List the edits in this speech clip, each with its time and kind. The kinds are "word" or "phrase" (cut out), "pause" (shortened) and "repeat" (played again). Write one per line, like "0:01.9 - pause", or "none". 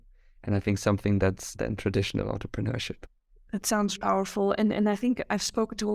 0:01.5 - phrase
0:03.9 - word